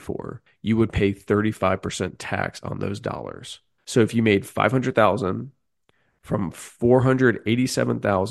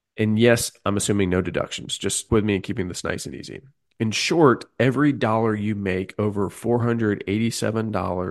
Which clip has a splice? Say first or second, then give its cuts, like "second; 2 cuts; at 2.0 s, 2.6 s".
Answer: second; 1 cut; at 2.3 s